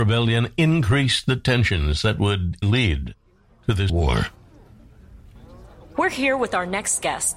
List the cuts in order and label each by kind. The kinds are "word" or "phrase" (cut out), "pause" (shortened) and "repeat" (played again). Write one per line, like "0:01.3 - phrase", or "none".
0:02.6 - word
0:03.9 - word